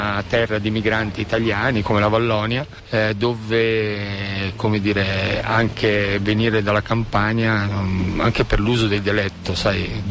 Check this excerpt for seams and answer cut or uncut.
uncut